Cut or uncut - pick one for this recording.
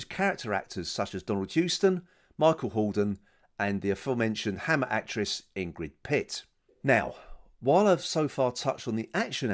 uncut